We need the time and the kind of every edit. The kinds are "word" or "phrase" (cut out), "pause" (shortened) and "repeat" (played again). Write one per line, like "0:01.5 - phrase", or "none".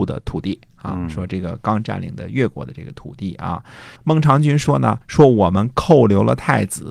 0:04.0 - pause
0:05.0 - pause